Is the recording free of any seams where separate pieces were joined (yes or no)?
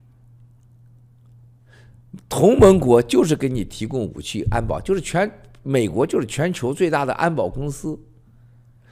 yes